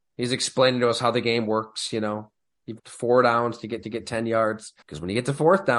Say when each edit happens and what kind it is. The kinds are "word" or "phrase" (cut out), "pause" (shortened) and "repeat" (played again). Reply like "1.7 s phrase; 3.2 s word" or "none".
2.8 s word; 3.8 s repeat; 4.8 s pause